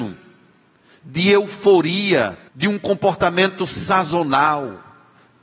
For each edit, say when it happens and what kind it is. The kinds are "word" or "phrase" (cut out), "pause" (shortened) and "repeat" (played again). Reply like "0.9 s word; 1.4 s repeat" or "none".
2.5 s pause